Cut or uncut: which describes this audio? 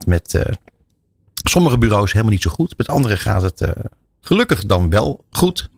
uncut